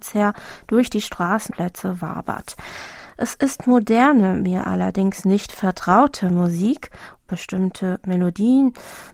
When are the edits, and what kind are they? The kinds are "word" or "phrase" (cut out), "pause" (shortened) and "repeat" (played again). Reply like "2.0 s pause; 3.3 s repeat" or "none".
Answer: 1.5 s word; 7.2 s word